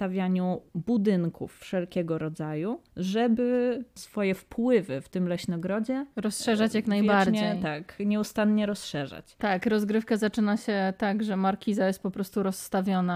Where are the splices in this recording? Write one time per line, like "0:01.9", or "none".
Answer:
0:02.9
0:06.1